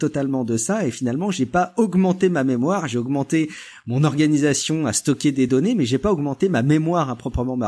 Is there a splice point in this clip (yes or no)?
no